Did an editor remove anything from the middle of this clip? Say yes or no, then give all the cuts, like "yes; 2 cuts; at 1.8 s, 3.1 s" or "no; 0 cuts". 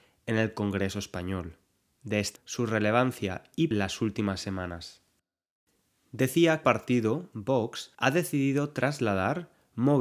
yes; 5 cuts; at 1.8 s, 2.4 s, 3.7 s, 6.6 s, 7.9 s